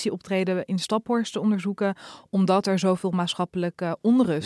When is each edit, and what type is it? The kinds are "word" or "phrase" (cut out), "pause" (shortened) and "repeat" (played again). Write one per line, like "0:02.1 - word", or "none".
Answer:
none